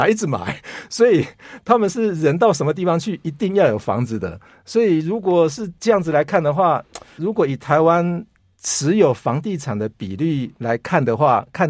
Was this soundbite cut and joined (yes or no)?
yes